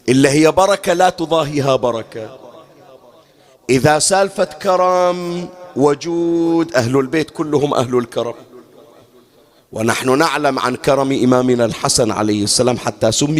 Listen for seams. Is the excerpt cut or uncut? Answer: uncut